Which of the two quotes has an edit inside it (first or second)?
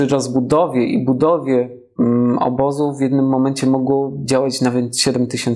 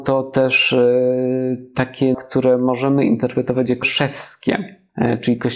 second